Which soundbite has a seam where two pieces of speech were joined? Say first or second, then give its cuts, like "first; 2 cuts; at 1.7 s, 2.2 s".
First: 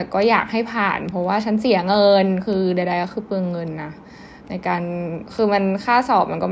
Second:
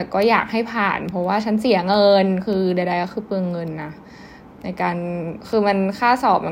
first; 1 cut; at 4.4 s